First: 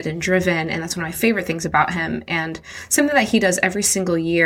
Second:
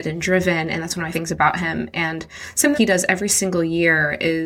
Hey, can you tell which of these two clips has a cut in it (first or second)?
second